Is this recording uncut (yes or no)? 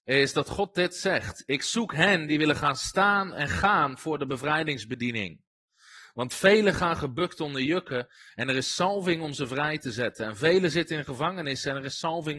yes